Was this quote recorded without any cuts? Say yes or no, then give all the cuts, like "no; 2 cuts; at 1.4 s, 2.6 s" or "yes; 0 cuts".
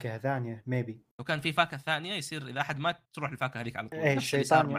no; 2 cuts; at 1.1 s, 3.1 s